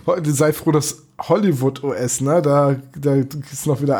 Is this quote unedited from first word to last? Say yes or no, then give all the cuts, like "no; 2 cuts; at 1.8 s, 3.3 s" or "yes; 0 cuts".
yes; 0 cuts